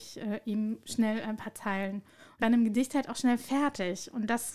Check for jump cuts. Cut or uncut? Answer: cut